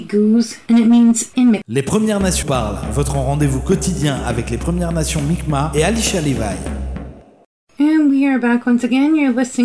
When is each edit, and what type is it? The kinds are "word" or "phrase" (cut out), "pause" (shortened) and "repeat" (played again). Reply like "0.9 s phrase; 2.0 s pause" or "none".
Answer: 1.3 s word; 2.4 s word